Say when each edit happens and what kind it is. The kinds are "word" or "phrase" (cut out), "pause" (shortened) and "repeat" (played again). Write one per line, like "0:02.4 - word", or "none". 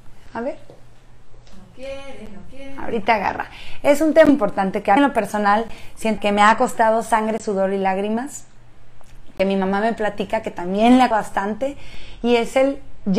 0:04.3 - word
0:05.0 - word
0:06.2 - word
0:11.1 - word